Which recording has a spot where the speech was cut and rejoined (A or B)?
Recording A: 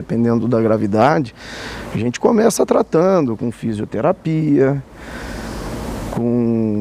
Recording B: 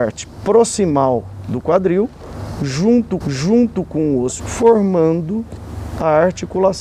B